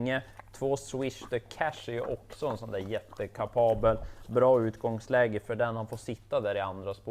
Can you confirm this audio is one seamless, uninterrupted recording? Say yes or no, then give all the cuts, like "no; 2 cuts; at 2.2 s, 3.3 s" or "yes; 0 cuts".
yes; 0 cuts